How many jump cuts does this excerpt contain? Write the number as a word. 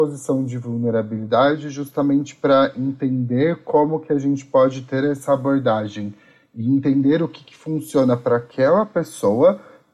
zero